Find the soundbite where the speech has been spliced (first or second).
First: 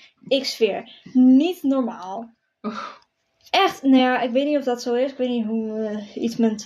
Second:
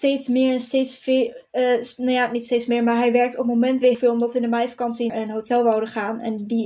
second